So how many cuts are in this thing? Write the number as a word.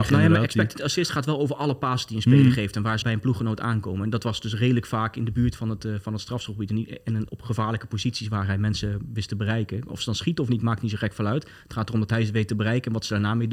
two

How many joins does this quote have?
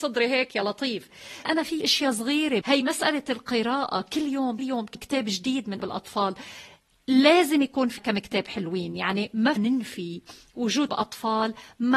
nine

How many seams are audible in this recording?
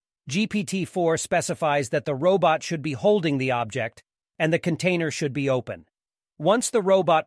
zero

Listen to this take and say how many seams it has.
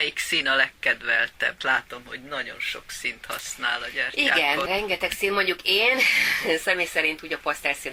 two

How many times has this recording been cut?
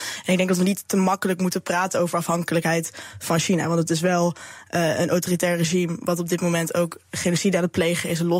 zero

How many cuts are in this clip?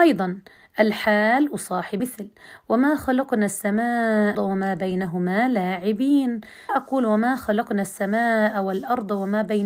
three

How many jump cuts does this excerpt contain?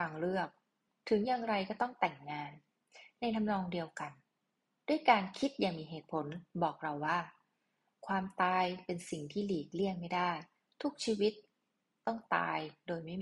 zero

